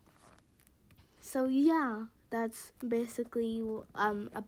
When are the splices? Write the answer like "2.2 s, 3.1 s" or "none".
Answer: 2.8 s